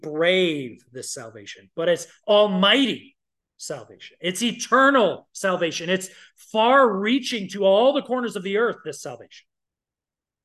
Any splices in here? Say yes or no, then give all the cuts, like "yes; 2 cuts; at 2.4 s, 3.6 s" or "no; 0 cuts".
no; 0 cuts